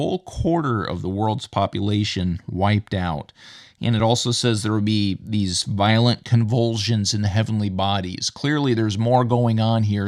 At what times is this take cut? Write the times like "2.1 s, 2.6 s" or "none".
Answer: none

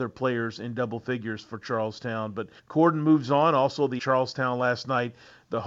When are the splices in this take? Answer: 2.6 s, 4.0 s

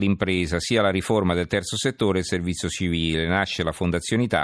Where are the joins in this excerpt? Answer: none

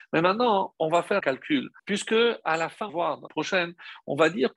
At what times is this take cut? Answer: 1.2 s, 1.8 s, 2.9 s, 3.3 s

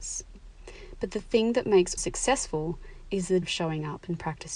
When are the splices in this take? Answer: 2.0 s, 3.4 s

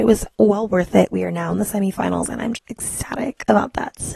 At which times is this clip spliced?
2.5 s

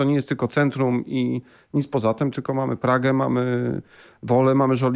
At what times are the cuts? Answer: none

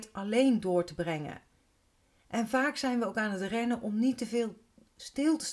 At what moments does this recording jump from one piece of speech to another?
none

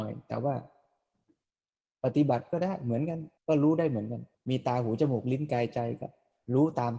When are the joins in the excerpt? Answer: 3.4 s, 4.3 s

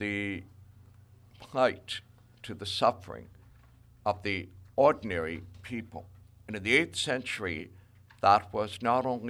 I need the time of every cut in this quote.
none

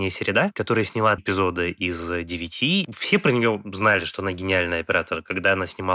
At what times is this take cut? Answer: 1.2 s

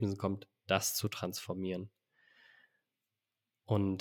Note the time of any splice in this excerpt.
none

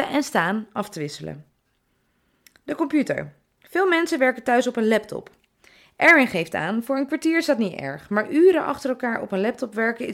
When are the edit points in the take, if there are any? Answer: none

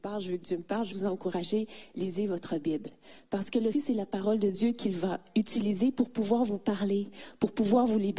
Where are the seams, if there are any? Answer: 0.9 s, 3.7 s

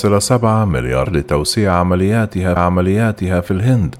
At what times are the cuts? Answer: 1.0 s, 2.6 s

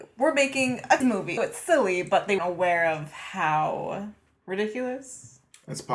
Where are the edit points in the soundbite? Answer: 1.0 s, 1.4 s, 2.4 s

